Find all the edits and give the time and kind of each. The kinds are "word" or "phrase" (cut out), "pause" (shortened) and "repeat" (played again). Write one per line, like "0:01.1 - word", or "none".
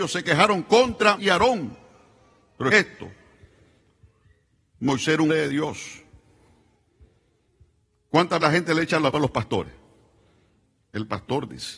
0:01.2 - word
0:02.7 - word
0:05.3 - word
0:08.4 - word
0:09.1 - word